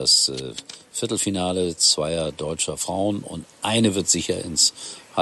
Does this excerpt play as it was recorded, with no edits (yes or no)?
yes